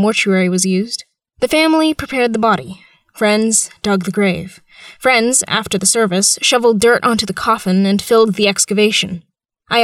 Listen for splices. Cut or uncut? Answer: uncut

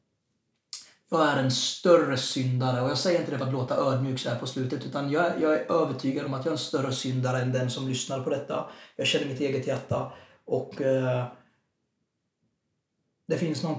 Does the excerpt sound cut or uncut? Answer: uncut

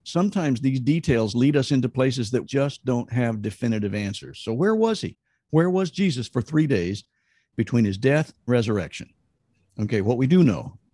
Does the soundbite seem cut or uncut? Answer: cut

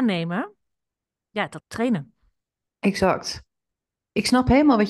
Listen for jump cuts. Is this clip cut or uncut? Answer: cut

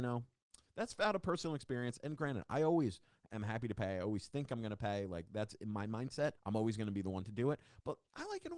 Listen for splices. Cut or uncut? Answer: cut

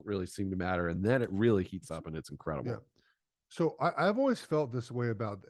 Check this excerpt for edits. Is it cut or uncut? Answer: uncut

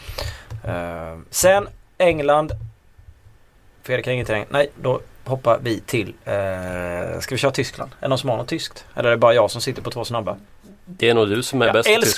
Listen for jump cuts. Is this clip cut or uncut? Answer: uncut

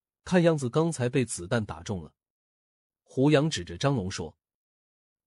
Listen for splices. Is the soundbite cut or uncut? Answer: uncut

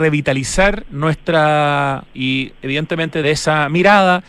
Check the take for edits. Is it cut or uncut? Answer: cut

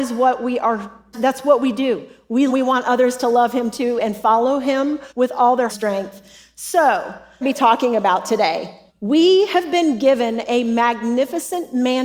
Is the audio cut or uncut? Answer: cut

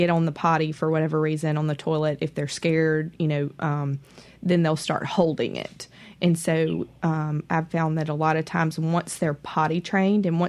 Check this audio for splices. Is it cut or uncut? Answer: uncut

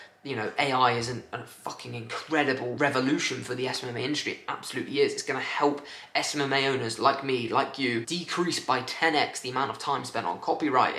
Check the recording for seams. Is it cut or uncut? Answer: uncut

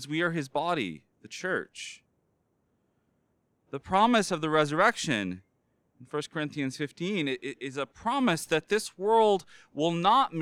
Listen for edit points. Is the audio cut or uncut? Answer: uncut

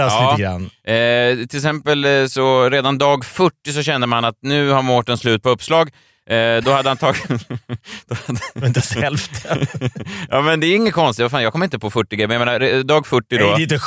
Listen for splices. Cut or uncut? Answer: uncut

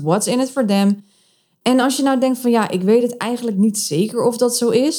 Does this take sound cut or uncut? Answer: uncut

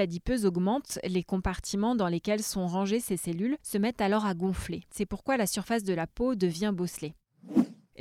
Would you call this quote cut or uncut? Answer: uncut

